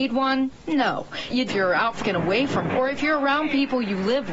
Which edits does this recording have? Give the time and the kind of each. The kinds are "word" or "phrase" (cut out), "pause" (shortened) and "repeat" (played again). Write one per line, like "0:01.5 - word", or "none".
0:01.5 - phrase
0:02.0 - phrase
0:02.7 - word